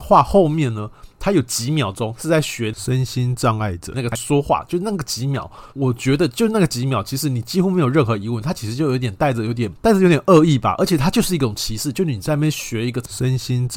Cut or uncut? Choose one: cut